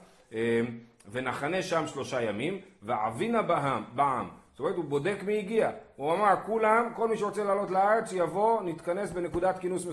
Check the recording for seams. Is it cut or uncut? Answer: uncut